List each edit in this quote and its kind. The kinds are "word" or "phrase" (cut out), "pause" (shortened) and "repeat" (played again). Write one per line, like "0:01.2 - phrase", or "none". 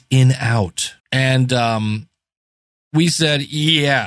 0:01.0 - pause